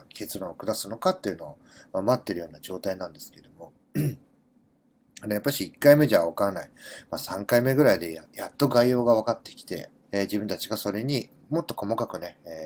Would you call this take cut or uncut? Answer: cut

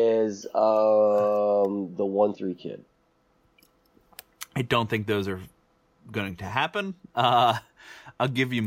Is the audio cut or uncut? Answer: cut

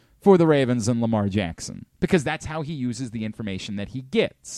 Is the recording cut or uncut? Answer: cut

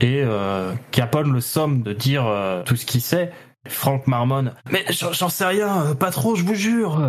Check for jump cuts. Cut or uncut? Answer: cut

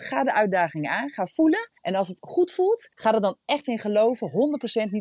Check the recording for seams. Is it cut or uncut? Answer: cut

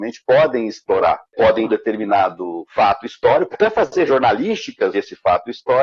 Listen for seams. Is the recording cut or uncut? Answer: cut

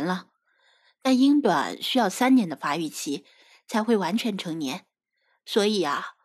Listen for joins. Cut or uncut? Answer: uncut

